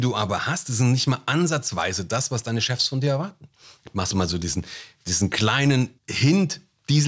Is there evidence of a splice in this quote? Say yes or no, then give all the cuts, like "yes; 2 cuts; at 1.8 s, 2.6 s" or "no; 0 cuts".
yes; 1 cut; at 6.0 s